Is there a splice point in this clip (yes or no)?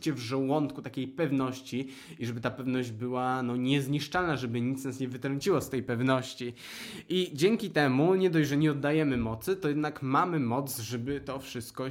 no